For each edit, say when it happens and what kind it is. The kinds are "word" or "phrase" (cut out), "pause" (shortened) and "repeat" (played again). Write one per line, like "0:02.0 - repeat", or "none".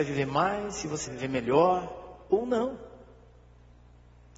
0:01.1 - word